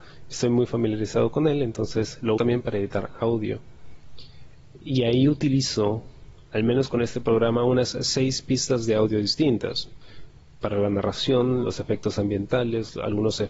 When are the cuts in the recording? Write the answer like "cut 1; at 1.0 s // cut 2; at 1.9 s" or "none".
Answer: cut 1; at 2.4 s